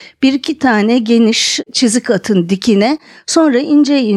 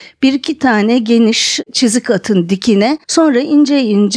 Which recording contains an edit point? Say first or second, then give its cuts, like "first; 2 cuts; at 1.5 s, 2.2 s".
second; 1 cut; at 3.0 s